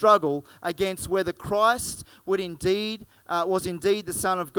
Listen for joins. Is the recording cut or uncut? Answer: uncut